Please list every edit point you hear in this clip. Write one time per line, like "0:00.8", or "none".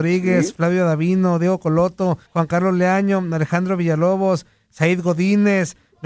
0:02.3

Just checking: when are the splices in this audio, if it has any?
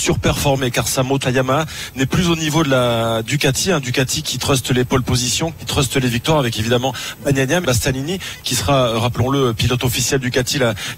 0:01.2
0:07.6

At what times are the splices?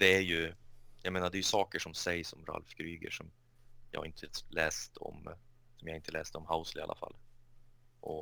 none

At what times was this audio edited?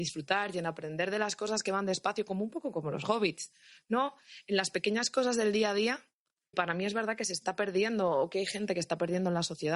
0:06.5

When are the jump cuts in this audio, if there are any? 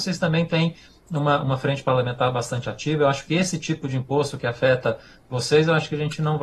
none

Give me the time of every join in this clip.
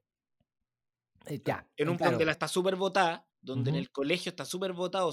0:02.0
0:02.3
0:03.3

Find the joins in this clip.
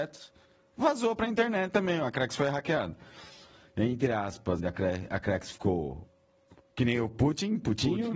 0:04.6

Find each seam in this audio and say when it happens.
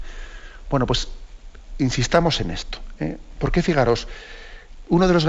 none

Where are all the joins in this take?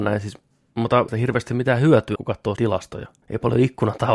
0:01.1
0:02.2
0:02.6

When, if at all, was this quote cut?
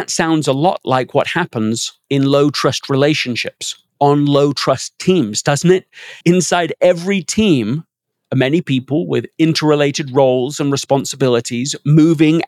0:03.9
0:06.2

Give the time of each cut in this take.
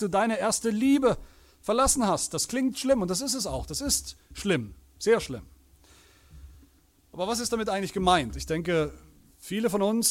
none

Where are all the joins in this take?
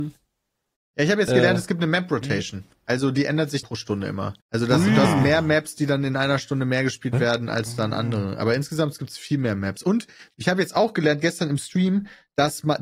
0:03.6
0:04.4

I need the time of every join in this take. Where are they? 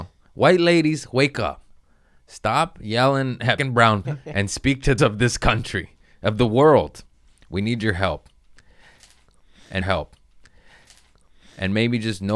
0:03.6
0:04.0
0:05.0
0:09.8

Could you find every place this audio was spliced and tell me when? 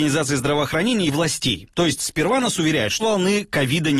0:01.7
0:03.0

